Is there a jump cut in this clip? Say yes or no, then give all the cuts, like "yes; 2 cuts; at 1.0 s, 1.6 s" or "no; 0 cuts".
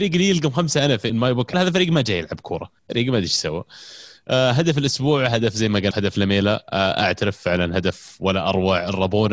yes; 4 cuts; at 1.1 s, 1.5 s, 2.8 s, 5.9 s